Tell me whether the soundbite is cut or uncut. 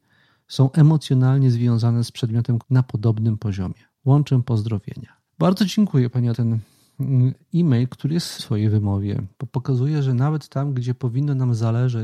cut